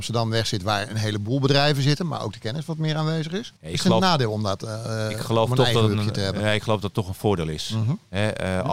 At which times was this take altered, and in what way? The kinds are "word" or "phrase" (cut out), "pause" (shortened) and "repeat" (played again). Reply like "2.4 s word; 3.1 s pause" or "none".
3.6 s pause